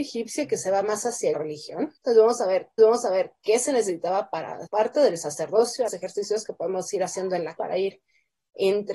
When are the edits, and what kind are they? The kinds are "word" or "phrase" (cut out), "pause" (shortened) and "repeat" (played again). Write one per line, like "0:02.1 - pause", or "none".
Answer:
0:01.3 - phrase
0:02.0 - pause
0:02.8 - repeat
0:04.7 - word
0:05.9 - word
0:07.6 - word